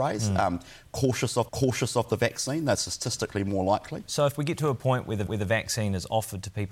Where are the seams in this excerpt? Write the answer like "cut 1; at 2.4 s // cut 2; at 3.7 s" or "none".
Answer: cut 1; at 1.5 s // cut 2; at 5.3 s